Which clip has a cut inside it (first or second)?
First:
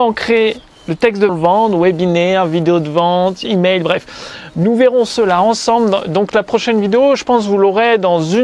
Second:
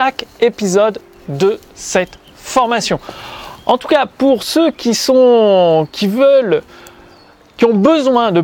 first